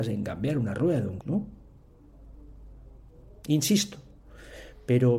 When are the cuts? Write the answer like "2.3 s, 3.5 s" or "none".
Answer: 1.2 s